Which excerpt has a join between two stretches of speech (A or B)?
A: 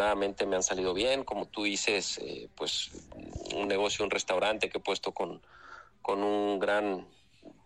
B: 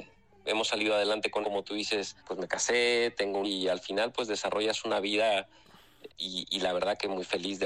B